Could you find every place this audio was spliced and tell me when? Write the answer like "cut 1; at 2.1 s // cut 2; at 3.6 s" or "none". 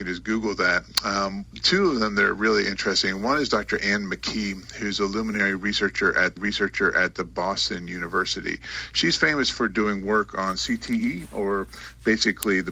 cut 1; at 6.4 s